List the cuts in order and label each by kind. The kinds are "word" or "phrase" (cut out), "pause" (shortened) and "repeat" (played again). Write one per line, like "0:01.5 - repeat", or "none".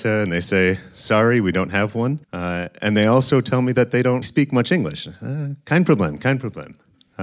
0:02.2 - pause
0:04.2 - word

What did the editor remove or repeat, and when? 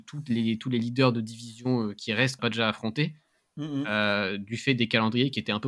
0:02.4 - word

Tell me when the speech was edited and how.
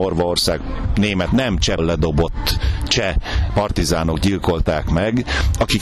0:01.3 - word
0:01.8 - phrase

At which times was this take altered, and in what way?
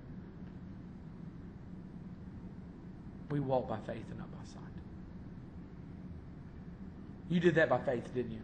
none

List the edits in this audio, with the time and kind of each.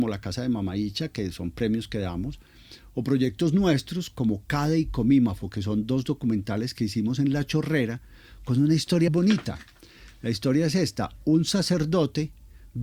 0:09.1 - word

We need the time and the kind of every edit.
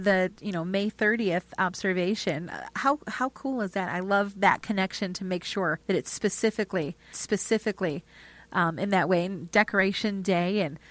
0:05.8 - pause
0:07.1 - repeat

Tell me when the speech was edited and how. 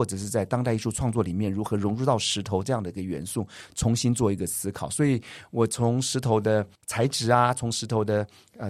0:06.8 - pause

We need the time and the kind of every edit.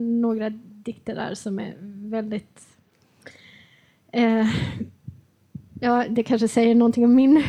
none

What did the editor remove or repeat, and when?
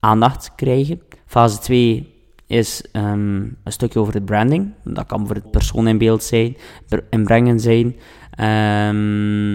0:01.2 - pause
0:03.7 - word
0:05.5 - word

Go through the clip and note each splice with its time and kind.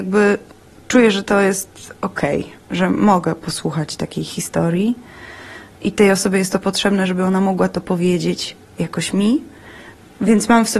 none

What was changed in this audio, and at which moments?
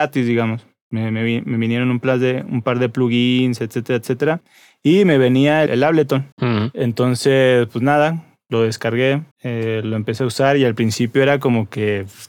0:05.7 - word
0:06.3 - pause
0:09.3 - pause

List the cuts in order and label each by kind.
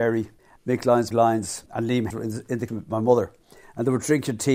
0:01.1 - word
0:01.7 - word
0:02.1 - word
0:02.7 - word

